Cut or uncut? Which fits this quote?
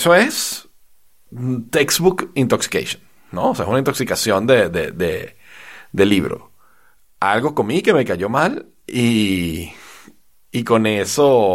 uncut